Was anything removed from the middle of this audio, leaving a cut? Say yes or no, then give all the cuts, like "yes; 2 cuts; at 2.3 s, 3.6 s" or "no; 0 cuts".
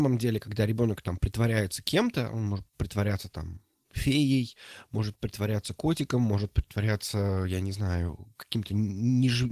no; 0 cuts